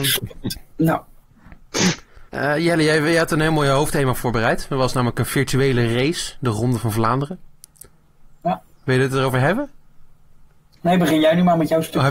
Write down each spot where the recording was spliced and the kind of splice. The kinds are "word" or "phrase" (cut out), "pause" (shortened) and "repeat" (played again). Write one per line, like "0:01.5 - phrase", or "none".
0:02.3 - pause
0:08.7 - pause